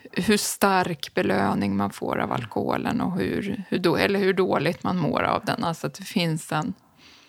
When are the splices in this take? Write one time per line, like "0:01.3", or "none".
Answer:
none